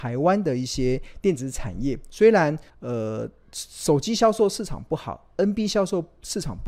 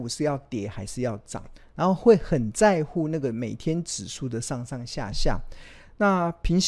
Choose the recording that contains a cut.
first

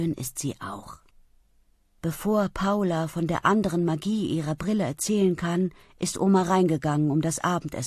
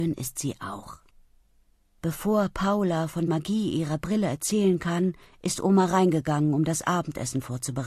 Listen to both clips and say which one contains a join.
second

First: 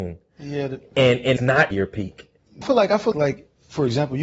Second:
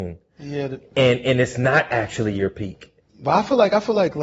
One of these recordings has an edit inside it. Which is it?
first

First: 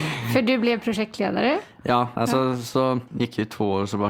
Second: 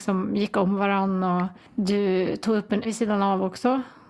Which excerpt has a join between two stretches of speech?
second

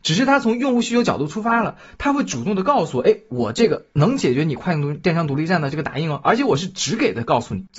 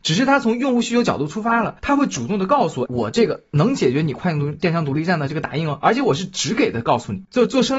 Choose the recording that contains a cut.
second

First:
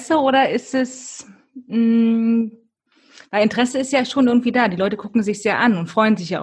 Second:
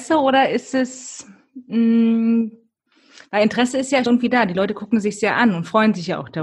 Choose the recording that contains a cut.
second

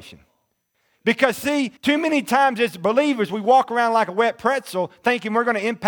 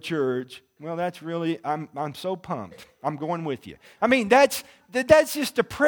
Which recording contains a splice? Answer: first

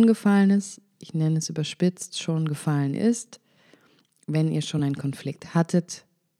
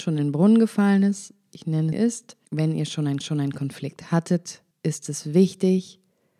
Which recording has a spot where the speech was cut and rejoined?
second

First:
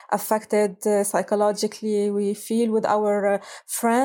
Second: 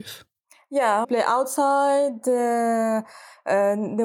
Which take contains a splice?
second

